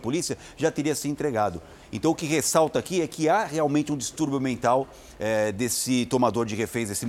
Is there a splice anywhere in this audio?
no; 0 cuts

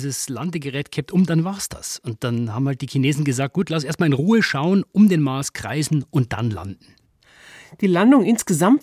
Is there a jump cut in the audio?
no; 0 cuts

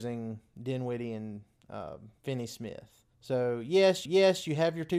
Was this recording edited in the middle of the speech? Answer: yes; 3 cuts; at 2.2 s, 3.1 s, 4.0 s

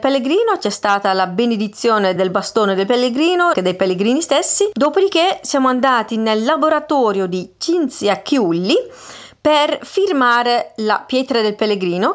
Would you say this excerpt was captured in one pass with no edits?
no; 2 cuts; at 2.2 s, 3.5 s

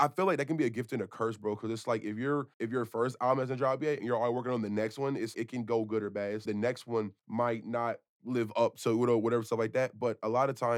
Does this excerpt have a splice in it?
yes; 4 cuts; at 2.5 s, 5.3 s, 6.4 s, 7.2 s

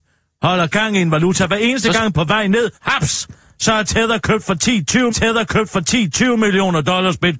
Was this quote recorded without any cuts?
no; 3 cuts; at 2.1 s, 2.7 s, 5.1 s

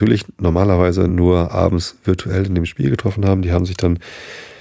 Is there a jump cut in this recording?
no; 0 cuts

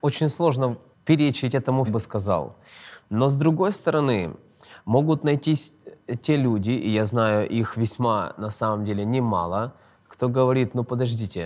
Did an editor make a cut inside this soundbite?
yes; 2 cuts; at 0.9 s, 1.9 s

